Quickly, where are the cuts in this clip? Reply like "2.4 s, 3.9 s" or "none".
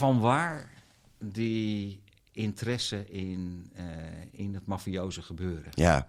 none

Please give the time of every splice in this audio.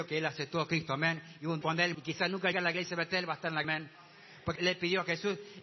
1.6 s, 1.9 s, 2.5 s, 3.6 s, 4.6 s

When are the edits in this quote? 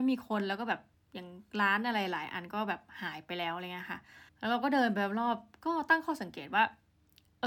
0.9 s, 4.3 s

